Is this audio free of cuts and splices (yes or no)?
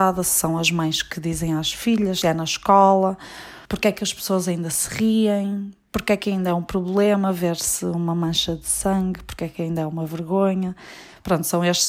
no